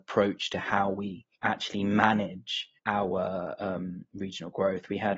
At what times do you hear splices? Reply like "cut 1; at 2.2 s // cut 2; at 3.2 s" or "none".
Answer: cut 1; at 1.4 s // cut 2; at 2.8 s

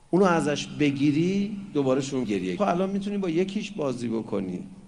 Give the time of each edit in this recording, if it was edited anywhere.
cut 1; at 2.2 s // cut 2; at 2.6 s

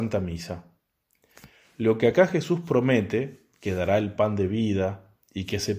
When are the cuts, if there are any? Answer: none

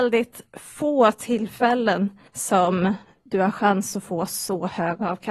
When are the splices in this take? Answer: cut 1; at 2.3 s

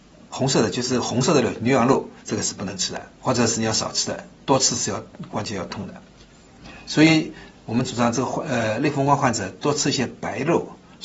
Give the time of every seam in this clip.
cut 1; at 2.2 s // cut 2; at 3.2 s

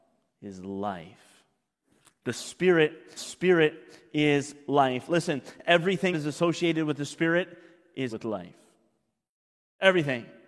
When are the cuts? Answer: cut 1; at 3.2 s // cut 2; at 6.1 s // cut 3; at 8.1 s

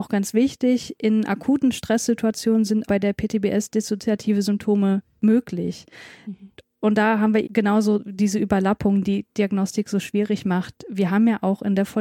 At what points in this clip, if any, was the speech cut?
cut 1; at 2.8 s // cut 2; at 5.2 s // cut 3; at 7.4 s // cut 4; at 9.0 s

